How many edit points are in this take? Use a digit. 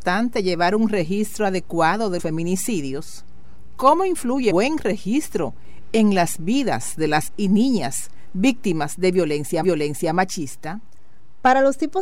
4